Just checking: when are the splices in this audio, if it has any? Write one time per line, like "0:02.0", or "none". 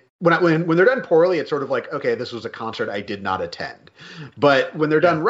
none